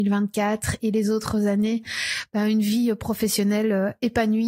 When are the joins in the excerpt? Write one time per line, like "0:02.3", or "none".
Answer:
none